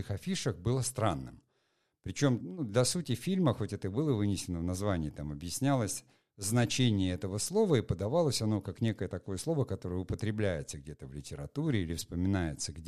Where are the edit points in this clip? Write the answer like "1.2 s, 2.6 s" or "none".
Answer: 2.4 s